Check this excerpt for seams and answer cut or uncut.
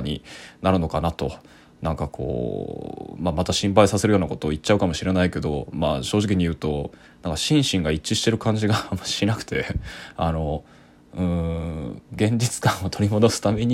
uncut